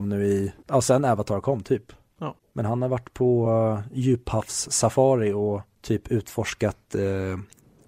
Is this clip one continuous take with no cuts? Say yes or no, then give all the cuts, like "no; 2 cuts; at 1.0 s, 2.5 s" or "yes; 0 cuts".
yes; 0 cuts